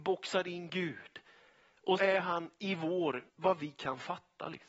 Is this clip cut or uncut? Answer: cut